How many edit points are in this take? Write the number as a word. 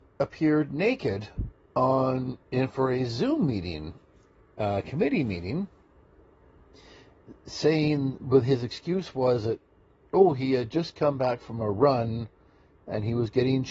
zero